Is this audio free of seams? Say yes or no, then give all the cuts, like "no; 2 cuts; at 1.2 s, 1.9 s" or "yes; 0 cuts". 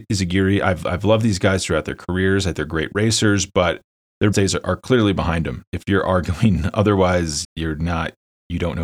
no; 3 cuts; at 2.5 s, 4.3 s, 7.4 s